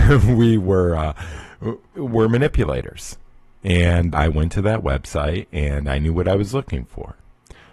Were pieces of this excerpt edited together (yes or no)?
yes